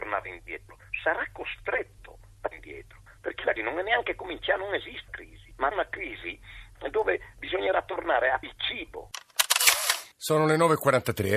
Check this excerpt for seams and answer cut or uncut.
cut